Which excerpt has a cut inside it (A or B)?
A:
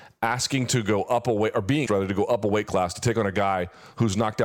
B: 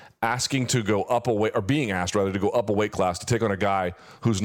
A